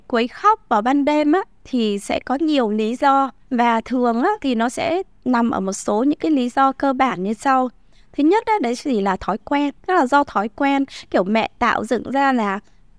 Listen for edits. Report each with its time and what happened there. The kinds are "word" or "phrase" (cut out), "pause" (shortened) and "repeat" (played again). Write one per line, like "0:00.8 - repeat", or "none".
0:03.4 - pause
0:09.8 - pause